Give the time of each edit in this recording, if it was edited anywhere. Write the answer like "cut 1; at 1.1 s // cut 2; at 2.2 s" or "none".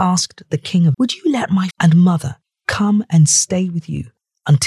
cut 1; at 0.9 s // cut 2; at 1.7 s

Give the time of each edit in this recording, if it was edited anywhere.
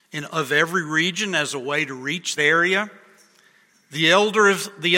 cut 1; at 2.4 s

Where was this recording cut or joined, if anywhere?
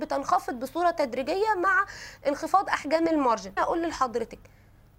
cut 1; at 3.6 s

